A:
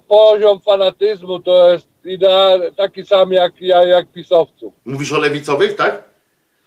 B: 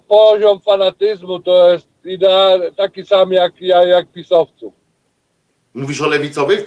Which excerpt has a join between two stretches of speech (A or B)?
A